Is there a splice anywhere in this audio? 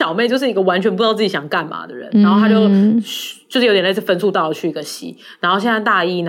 no; 0 cuts

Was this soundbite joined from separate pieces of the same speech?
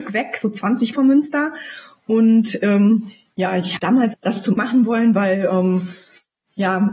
yes; 4 cuts; at 0.9 s, 3.8 s, 4.1 s, 4.6 s

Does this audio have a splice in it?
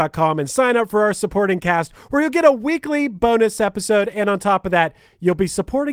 no; 0 cuts

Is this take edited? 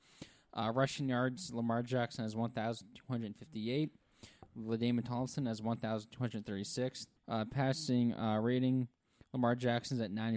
yes; 1 cut; at 7.2 s

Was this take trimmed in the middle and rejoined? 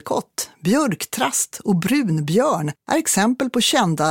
yes; 1 cut; at 2.8 s

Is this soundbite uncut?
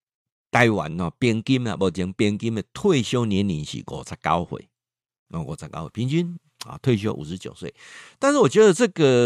yes; 0 cuts

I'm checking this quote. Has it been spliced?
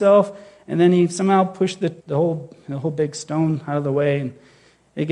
yes; 1 cut; at 2.0 s

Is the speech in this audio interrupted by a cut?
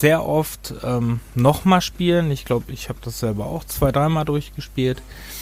no; 0 cuts

